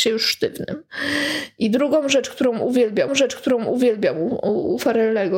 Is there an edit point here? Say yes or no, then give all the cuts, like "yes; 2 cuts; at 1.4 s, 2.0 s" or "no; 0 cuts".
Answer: yes; 1 cut; at 3.1 s